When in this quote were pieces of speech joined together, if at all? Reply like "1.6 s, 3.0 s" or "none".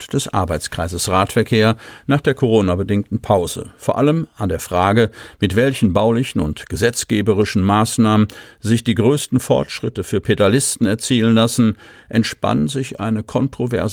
none